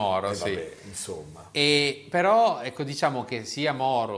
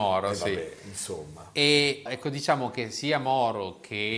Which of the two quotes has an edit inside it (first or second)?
second